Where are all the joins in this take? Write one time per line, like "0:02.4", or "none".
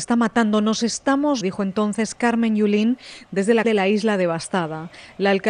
0:01.4
0:03.6